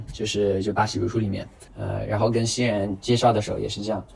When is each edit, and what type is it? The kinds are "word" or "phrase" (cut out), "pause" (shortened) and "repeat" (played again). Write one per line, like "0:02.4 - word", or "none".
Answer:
0:01.7 - pause